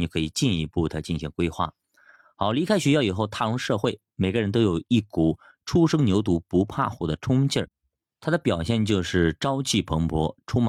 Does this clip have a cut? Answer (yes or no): no